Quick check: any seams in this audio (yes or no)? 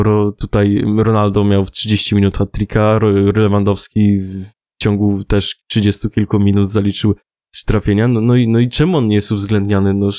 no